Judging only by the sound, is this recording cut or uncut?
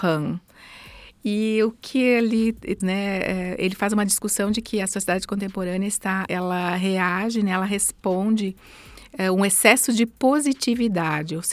cut